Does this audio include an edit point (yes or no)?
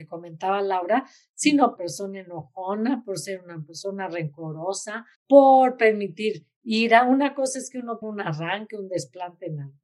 yes